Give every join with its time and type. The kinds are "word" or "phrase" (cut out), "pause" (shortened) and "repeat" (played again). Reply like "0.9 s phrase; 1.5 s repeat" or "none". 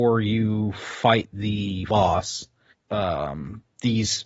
1.9 s word; 2.7 s word